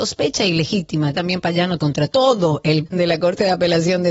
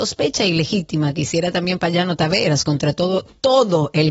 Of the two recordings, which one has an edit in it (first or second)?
first